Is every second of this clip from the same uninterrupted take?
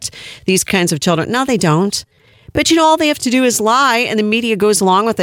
yes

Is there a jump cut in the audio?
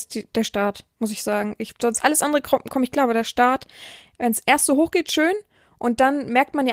no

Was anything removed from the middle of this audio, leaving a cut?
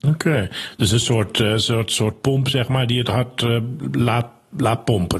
no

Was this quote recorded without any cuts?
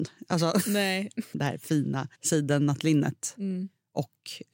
no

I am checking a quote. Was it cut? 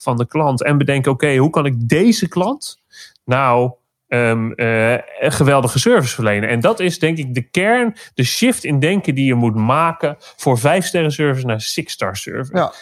no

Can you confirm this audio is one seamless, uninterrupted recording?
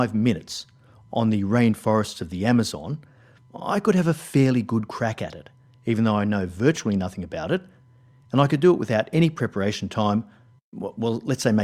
yes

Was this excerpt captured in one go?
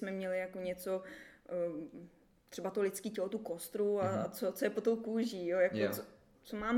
yes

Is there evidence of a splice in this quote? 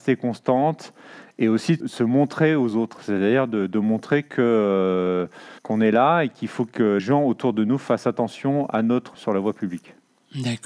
yes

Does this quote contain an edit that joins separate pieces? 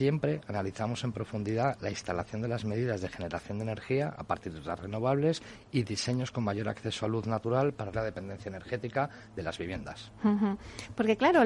yes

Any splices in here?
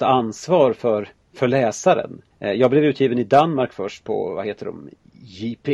yes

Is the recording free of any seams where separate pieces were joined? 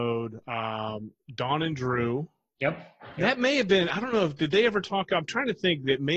yes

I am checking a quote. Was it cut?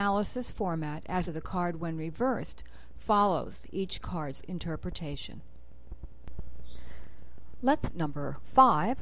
yes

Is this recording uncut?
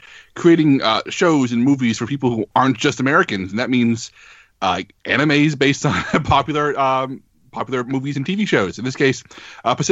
no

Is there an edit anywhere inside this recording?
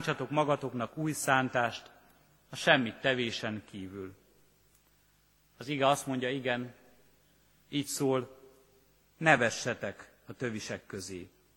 no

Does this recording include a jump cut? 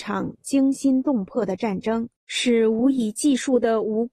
yes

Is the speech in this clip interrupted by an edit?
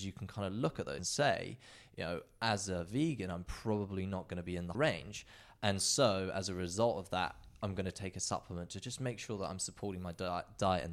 yes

